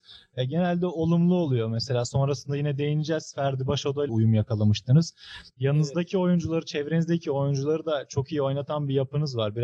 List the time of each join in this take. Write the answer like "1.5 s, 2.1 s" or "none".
4.1 s